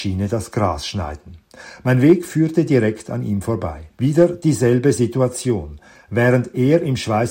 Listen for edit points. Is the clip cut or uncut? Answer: cut